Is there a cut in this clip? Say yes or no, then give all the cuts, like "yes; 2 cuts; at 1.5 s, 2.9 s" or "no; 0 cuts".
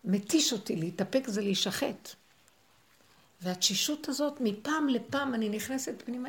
no; 0 cuts